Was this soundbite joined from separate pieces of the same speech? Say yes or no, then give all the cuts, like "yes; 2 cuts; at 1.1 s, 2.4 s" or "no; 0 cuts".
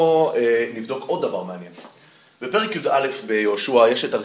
no; 0 cuts